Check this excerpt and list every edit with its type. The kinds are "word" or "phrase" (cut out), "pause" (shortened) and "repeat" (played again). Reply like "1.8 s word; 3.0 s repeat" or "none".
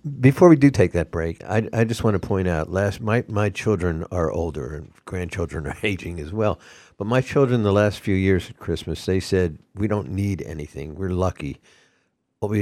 none